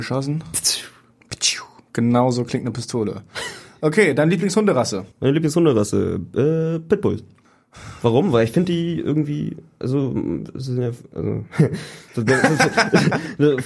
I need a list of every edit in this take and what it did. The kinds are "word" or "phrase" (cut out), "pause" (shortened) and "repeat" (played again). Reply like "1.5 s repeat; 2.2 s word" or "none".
5.1 s pause; 12.1 s pause